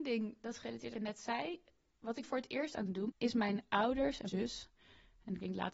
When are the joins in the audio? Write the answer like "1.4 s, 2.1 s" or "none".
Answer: 0.9 s, 2.2 s, 3.1 s, 4.3 s